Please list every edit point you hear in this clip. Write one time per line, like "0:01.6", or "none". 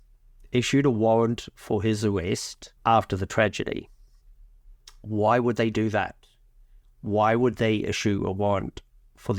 0:02.8